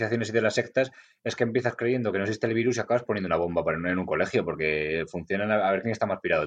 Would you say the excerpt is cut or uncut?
uncut